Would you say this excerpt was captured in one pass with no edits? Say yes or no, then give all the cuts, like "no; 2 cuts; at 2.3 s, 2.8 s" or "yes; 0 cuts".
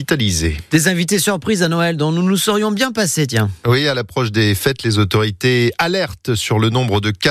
yes; 0 cuts